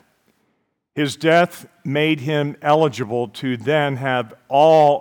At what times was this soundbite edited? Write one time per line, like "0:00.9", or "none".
none